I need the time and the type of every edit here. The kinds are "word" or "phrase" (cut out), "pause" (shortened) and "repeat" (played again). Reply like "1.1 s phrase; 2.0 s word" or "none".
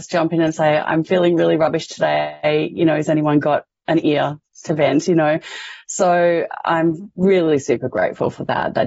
none